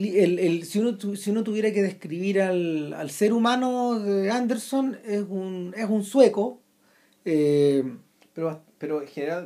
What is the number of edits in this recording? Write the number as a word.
zero